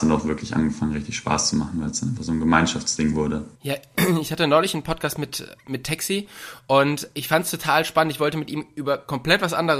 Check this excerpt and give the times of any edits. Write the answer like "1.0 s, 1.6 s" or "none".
3.5 s